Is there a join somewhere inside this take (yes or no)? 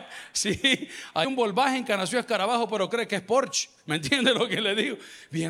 yes